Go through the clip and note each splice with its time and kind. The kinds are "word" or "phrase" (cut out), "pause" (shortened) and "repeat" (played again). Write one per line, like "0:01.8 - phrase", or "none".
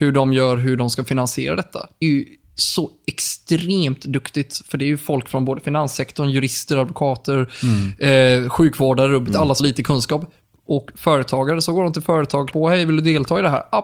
0:02.0 - word
0:09.6 - word
0:12.5 - word